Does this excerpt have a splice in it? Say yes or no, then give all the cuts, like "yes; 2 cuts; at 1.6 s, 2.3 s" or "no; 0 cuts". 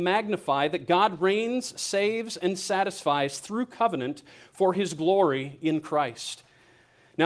no; 0 cuts